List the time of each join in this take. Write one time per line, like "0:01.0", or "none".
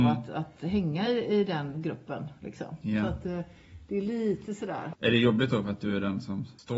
none